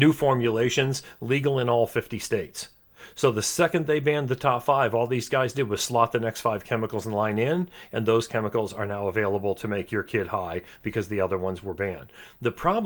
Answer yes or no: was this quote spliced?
no